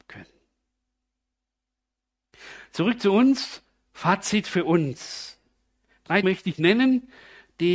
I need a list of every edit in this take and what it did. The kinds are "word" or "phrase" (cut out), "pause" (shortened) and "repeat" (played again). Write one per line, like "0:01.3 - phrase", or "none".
0:06.2 - word